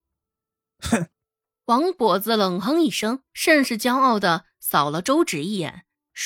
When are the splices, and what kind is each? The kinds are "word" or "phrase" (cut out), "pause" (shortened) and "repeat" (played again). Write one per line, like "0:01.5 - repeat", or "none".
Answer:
0:01.1 - pause
0:03.3 - pause